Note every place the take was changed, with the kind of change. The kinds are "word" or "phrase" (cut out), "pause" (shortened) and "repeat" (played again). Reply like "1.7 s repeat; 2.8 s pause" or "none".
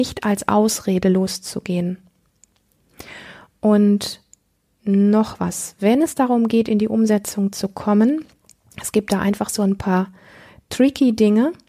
none